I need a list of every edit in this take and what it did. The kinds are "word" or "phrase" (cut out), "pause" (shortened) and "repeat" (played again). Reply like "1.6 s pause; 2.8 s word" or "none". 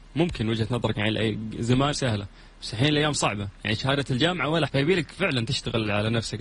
0.9 s word; 1.9 s word; 4.7 s phrase